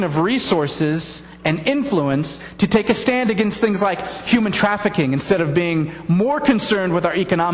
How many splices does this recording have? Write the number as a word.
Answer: zero